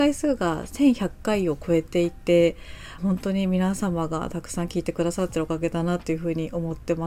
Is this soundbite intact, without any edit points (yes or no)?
no